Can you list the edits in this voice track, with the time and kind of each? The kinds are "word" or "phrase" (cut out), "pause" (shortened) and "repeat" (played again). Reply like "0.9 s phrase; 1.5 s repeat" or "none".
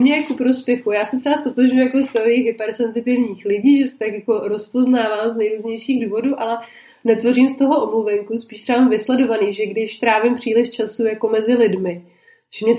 none